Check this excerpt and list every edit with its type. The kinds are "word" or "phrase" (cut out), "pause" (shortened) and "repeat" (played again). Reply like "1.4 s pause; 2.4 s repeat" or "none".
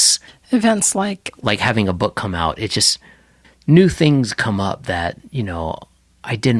none